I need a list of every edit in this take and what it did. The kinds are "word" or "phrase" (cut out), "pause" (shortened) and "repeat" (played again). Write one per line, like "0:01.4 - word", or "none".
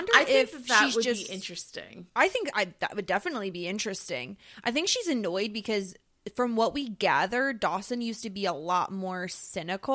0:02.1 - pause